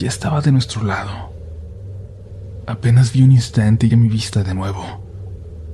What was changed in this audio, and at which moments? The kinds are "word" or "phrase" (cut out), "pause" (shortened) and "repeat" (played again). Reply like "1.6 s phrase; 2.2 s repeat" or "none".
3.9 s word